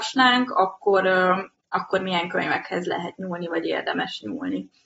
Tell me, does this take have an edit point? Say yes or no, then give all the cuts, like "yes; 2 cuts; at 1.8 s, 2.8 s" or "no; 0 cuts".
no; 0 cuts